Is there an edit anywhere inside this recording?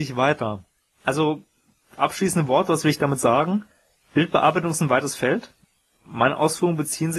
no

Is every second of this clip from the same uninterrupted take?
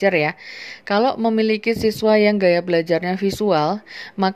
yes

